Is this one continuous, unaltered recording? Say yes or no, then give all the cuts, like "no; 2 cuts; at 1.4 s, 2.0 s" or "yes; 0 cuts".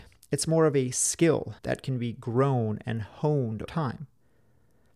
no; 2 cuts; at 1.6 s, 3.7 s